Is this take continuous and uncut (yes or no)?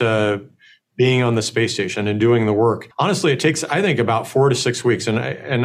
no